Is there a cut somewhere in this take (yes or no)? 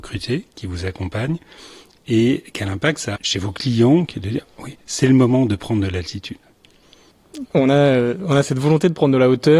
yes